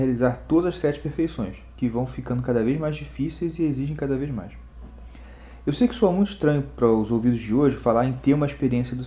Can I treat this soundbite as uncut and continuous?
yes; 0 cuts

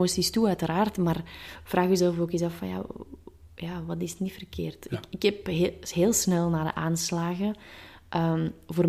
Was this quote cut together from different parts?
no; 0 cuts

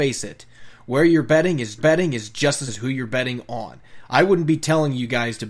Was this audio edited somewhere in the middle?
yes; 2 cuts; at 1.8 s, 2.7 s

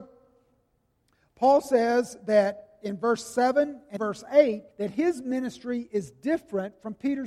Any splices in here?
yes; 2 cuts; at 4.0 s, 4.7 s

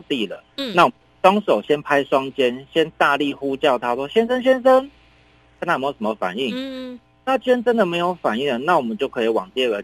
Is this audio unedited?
yes; 0 cuts

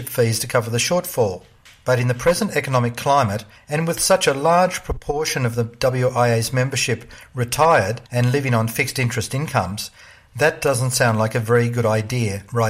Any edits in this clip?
yes; 1 cut; at 8.1 s

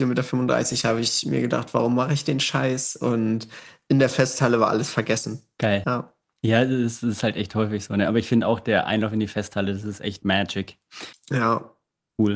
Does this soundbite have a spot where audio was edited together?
yes; 1 cut; at 10.2 s

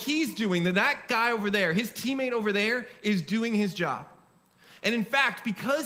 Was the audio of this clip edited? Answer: no; 0 cuts

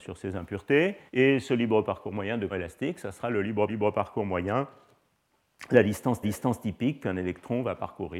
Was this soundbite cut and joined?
yes; 4 cuts; at 1.1 s, 2.5 s, 3.7 s, 6.2 s

